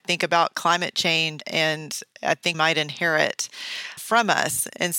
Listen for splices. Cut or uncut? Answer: cut